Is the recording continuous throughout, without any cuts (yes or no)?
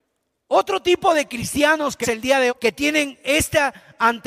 no